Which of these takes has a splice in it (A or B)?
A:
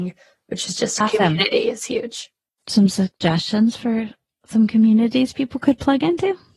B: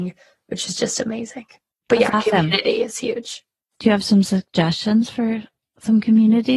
A